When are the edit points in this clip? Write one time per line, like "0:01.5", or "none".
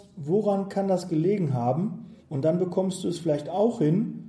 0:02.2